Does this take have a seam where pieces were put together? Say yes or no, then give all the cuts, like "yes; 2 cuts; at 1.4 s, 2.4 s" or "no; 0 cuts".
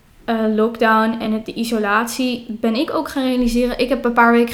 no; 0 cuts